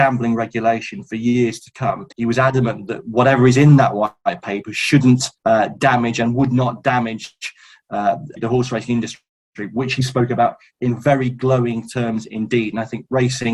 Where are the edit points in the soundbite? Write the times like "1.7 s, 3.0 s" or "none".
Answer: 2.1 s, 5.4 s, 8.4 s